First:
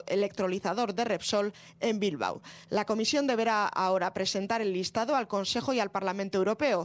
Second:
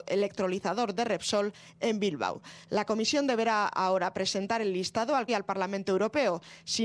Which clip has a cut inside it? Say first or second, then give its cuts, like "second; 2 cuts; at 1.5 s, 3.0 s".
second; 1 cut; at 5.3 s